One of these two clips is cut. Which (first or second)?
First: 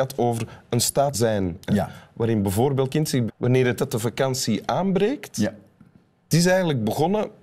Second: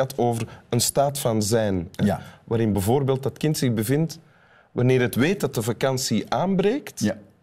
first